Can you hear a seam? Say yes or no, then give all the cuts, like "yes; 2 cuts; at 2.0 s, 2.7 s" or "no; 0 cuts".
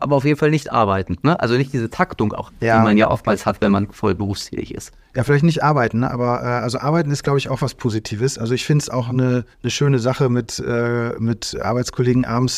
yes; 2 cuts; at 2.5 s, 9.5 s